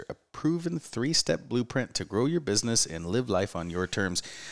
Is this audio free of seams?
yes; 0 cuts

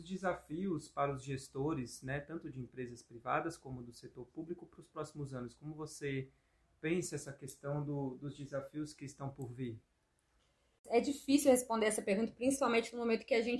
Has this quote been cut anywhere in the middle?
no; 0 cuts

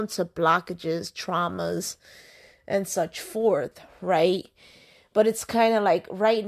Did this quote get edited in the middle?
no; 0 cuts

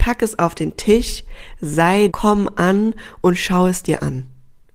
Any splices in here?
yes; 1 cut; at 2.1 s

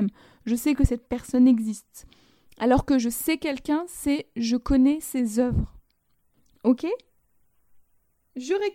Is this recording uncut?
yes; 0 cuts

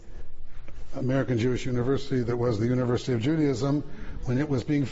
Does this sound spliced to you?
no; 0 cuts

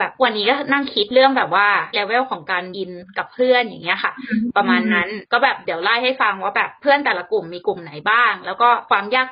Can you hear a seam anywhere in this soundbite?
yes; 2 cuts; at 1.9 s, 2.7 s

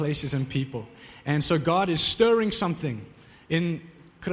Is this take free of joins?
yes; 0 cuts

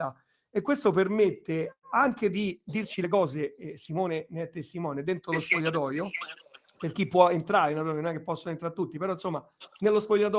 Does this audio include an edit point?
yes; 1 cut; at 1.8 s

